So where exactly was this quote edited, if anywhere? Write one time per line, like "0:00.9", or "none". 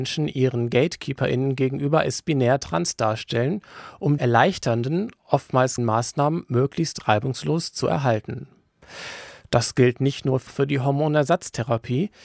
0:04.2
0:05.8
0:10.5